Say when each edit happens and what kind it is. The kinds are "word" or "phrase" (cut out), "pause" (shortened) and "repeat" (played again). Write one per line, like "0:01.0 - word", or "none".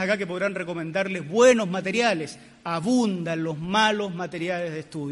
none